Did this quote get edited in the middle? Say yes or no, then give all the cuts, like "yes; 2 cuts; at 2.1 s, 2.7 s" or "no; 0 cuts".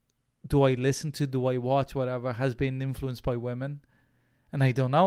no; 0 cuts